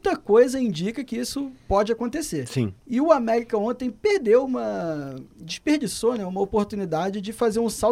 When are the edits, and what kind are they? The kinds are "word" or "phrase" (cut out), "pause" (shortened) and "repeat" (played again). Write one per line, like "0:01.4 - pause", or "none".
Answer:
0:01.6 - pause
0:02.8 - pause